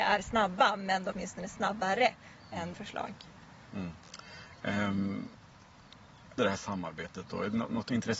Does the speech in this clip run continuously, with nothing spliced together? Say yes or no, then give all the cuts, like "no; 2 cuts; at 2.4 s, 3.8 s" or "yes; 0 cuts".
no; 3 cuts; at 1.1 s, 2.7 s, 6.4 s